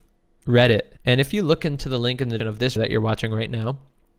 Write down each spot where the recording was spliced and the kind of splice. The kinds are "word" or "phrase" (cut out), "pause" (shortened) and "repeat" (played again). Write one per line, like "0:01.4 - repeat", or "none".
0:01.0 - pause
0:02.4 - word
0:02.8 - word